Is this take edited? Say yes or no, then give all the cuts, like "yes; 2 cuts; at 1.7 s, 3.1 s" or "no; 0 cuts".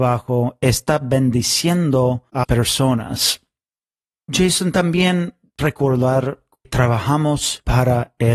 yes; 3 cuts; at 2.4 s, 5.6 s, 6.6 s